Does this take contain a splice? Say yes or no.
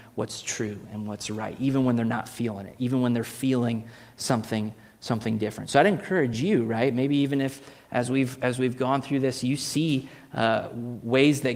no